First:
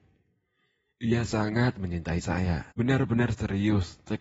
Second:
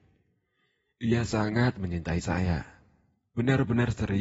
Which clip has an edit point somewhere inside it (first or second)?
first